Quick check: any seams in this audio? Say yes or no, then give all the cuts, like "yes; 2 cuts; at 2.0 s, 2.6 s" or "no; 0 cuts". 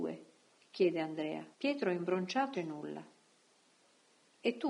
yes; 2 cuts; at 1.5 s, 2.5 s